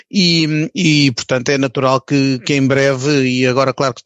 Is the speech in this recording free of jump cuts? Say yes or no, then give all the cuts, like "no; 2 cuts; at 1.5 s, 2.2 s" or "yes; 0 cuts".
yes; 0 cuts